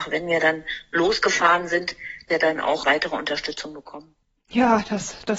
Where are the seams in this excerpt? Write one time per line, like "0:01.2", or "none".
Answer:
0:02.3
0:02.8

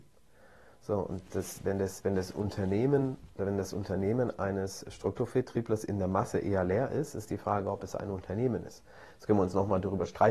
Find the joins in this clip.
none

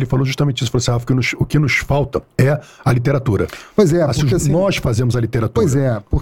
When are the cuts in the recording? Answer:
0:02.3

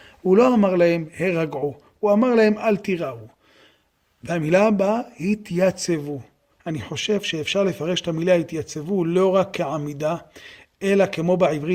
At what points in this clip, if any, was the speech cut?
none

